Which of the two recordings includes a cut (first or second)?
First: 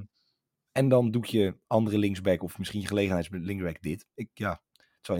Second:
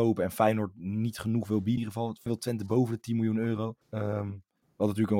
second